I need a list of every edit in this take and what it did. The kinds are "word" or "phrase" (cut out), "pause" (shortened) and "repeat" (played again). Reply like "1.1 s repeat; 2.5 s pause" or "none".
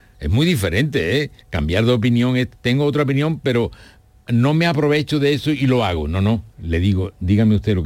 1.4 s pause; 2.6 s pause